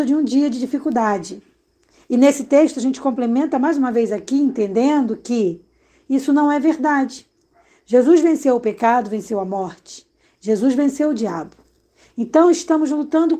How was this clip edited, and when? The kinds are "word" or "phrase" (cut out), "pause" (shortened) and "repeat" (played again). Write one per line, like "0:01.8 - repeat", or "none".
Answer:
none

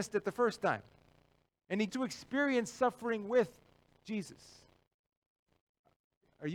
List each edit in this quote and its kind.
0:01.9 - word

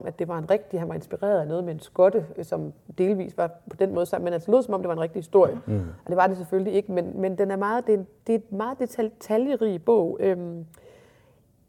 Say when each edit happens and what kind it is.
none

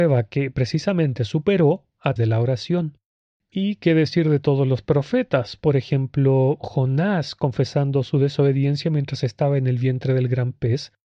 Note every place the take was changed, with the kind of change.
0:02.2 - word

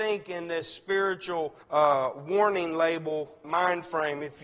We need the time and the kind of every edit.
0:01.6 - pause
0:03.4 - word

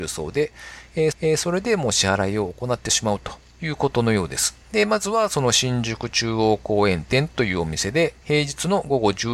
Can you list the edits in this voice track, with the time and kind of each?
0:01.1 - repeat
0:04.6 - pause
0:08.2 - pause

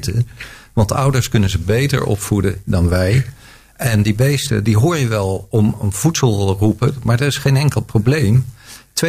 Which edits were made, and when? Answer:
none

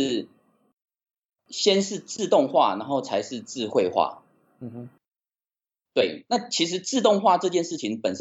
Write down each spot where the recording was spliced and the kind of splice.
none

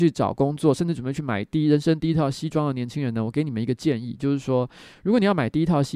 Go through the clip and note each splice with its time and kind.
none

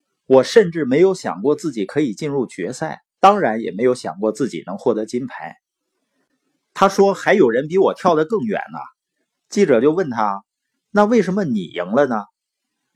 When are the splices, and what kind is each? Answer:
0:03.2 - pause

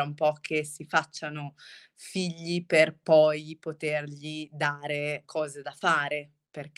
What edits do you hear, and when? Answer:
0:05.2 - word

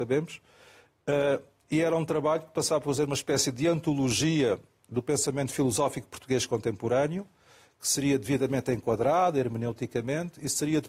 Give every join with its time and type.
none

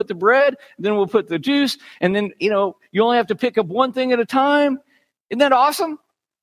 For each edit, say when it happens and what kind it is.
none

